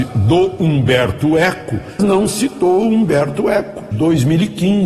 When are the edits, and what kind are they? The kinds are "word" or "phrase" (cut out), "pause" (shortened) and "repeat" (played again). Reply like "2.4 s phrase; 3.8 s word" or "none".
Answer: 2.0 s word; 3.9 s word